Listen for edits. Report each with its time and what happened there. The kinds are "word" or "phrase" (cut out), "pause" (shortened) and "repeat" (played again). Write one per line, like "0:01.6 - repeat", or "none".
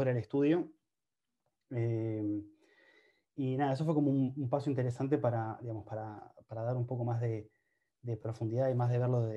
none